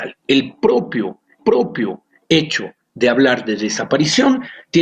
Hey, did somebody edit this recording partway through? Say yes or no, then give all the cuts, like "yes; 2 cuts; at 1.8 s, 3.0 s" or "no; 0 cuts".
yes; 1 cut; at 1.4 s